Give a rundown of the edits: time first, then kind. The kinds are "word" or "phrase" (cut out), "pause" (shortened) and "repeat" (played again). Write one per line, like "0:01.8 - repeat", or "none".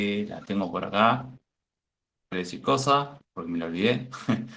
0:02.3 - word
0:02.6 - word
0:03.2 - pause